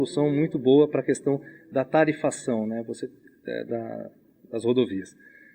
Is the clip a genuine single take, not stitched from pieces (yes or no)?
no